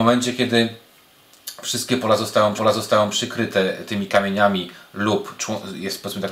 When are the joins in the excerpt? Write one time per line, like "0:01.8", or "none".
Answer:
0:02.6